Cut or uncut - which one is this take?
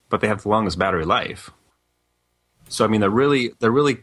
uncut